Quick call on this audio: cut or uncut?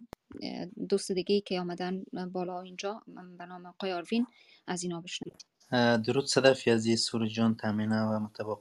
uncut